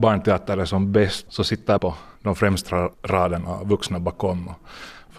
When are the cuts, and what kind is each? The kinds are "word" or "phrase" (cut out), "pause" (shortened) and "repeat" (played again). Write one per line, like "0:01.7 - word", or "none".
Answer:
0:01.3 - word
0:01.8 - word
0:02.2 - pause
0:02.9 - pause